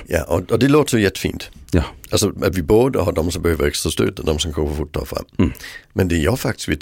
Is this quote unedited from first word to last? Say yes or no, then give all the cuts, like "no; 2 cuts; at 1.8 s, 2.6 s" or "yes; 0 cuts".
yes; 0 cuts